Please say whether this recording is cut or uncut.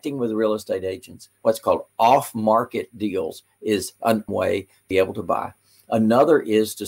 cut